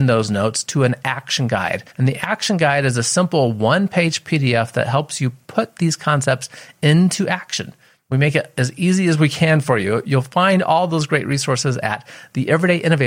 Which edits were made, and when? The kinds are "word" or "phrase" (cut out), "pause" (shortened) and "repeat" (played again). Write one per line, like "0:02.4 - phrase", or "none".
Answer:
0:01.9 - pause